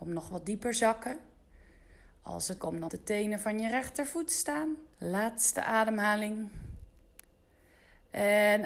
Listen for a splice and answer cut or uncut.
cut